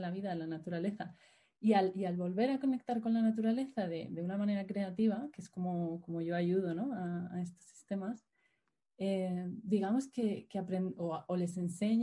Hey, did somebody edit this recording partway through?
no; 0 cuts

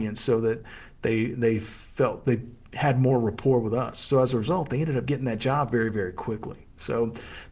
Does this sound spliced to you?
no; 0 cuts

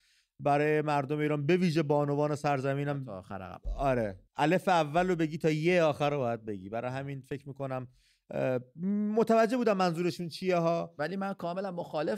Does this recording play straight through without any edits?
no; 1 cut; at 4.3 s

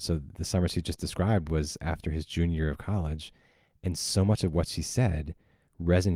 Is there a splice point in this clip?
no; 0 cuts

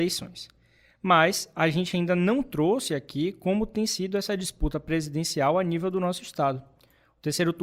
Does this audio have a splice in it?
no; 0 cuts

